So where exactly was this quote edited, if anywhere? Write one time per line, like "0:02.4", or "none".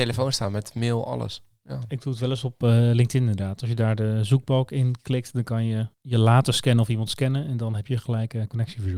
0:05.9